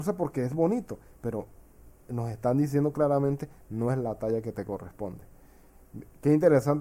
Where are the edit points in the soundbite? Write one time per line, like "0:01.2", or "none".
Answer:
none